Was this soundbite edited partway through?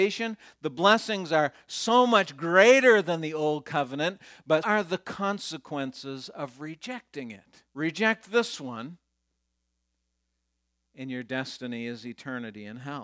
yes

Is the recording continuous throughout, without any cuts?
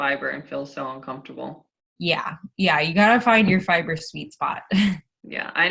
yes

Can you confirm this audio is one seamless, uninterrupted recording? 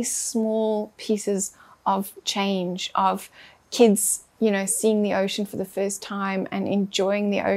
yes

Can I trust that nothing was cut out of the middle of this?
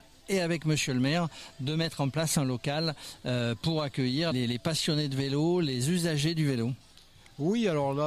no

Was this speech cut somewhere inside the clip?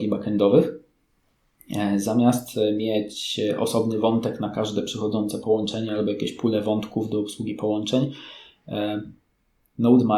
no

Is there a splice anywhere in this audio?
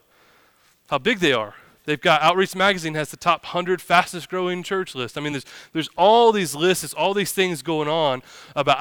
no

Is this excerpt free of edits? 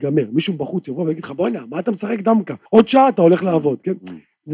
no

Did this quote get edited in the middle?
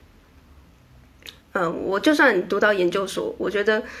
yes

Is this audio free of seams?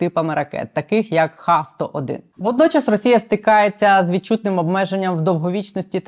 yes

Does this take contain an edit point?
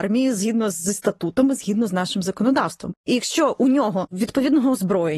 yes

